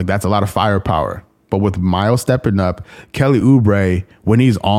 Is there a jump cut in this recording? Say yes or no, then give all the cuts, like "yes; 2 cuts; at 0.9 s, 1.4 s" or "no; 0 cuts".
no; 0 cuts